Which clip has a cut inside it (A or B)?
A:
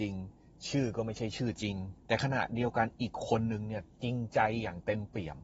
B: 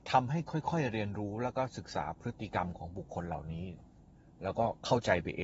A